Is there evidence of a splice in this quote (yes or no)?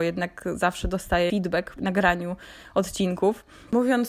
yes